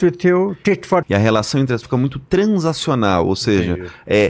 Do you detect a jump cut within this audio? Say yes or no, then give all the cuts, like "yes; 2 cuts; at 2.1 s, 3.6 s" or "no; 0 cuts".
yes; 2 cuts; at 1.0 s, 1.8 s